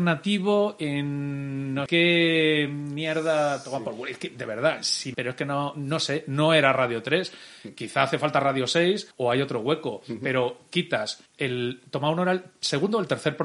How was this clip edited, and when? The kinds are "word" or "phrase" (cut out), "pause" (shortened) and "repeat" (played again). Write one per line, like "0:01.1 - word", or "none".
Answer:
0:01.9 - word
0:05.1 - word
0:09.1 - pause
0:11.3 - pause